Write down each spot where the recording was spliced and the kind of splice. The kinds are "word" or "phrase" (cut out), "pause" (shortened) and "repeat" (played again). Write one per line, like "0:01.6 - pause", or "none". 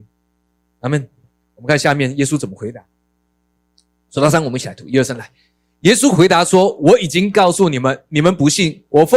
none